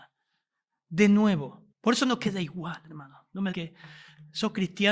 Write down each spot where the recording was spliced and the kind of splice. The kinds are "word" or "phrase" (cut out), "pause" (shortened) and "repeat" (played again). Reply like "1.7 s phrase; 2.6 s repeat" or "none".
1.7 s pause; 3.5 s word